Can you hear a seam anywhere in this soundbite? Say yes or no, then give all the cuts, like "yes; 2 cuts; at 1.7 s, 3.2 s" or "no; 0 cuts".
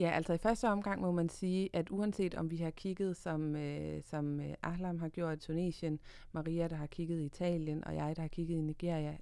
yes; 1 cut; at 5.4 s